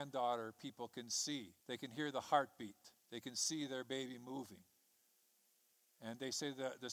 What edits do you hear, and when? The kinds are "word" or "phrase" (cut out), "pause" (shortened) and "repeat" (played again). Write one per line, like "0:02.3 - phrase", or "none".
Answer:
0:01.6 - pause
0:03.0 - pause